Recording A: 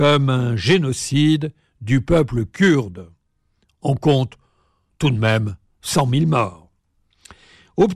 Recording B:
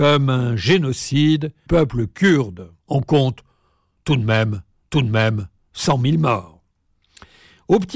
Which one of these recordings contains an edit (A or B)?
B